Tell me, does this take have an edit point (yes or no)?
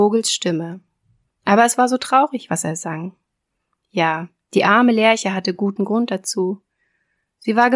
no